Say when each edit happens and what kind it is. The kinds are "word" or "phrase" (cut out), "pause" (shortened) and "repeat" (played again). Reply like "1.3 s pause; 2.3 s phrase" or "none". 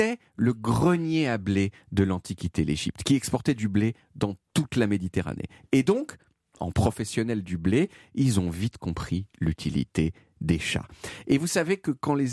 none